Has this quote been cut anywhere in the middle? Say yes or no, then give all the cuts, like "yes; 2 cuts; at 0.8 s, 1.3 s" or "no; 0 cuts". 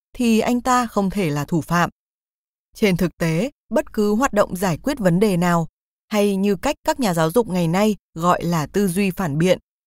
no; 0 cuts